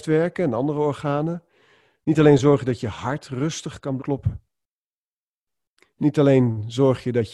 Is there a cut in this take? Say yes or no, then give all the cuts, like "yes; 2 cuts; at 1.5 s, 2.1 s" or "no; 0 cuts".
yes; 1 cut; at 4.0 s